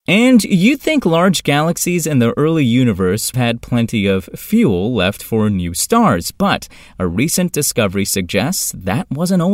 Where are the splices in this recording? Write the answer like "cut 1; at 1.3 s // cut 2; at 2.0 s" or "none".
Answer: cut 1; at 3.3 s